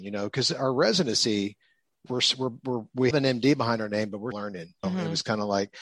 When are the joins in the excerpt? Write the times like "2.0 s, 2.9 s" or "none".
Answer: 2.1 s, 3.1 s, 4.3 s, 4.8 s